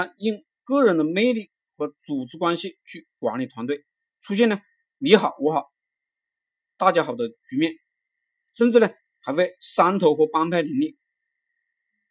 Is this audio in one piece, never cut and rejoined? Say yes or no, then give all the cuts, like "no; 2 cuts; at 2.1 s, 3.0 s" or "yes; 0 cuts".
yes; 0 cuts